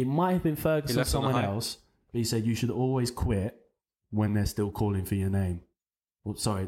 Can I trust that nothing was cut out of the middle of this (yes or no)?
yes